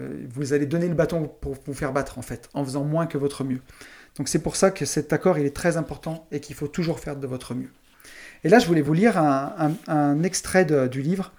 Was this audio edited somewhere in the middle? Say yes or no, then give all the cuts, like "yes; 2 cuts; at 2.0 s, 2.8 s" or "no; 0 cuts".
no; 0 cuts